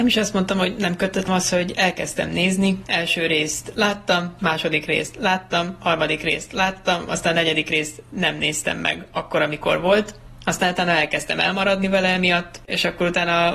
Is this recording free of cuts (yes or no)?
no